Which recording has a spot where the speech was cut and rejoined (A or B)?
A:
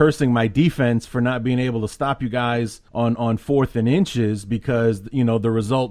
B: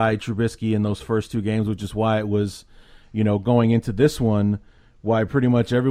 A